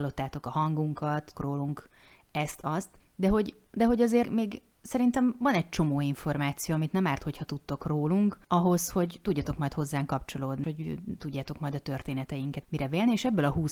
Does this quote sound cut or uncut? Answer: cut